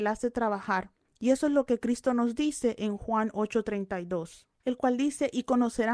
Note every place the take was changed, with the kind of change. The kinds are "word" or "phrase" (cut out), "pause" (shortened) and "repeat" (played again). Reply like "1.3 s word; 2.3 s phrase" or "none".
none